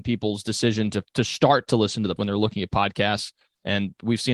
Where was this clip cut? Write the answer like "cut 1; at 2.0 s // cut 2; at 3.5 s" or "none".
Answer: cut 1; at 1.1 s // cut 2; at 2.2 s